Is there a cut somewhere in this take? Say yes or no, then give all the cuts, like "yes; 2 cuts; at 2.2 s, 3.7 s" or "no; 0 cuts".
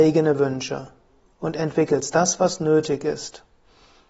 no; 0 cuts